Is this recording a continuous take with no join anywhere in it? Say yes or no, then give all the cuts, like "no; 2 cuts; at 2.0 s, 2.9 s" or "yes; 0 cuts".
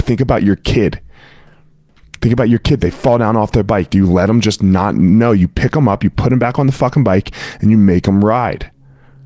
yes; 0 cuts